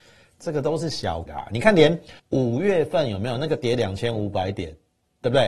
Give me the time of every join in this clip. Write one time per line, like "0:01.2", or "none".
0:01.3
0:02.2